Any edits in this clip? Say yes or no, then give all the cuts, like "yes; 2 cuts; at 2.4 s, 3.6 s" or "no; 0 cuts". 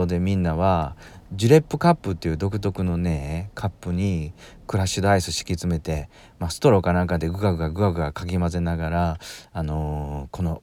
no; 0 cuts